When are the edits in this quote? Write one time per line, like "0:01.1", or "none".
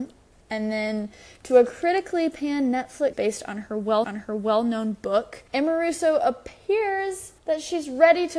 0:03.1
0:04.0
0:05.5
0:07.4